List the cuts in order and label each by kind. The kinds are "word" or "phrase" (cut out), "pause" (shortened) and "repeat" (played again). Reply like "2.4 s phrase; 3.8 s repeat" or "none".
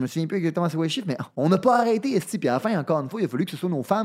1.3 s pause